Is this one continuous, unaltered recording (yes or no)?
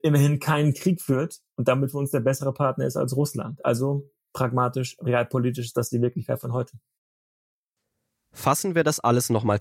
yes